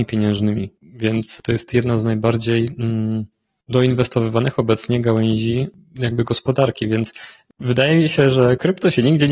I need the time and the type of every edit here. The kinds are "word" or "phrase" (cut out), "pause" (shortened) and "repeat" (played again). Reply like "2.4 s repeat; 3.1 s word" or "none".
none